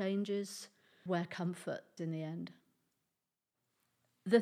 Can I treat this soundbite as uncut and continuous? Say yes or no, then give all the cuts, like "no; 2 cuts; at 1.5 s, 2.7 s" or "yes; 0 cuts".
no; 2 cuts; at 1.1 s, 2.0 s